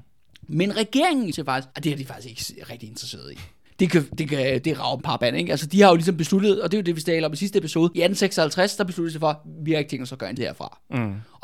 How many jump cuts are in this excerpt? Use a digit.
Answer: 7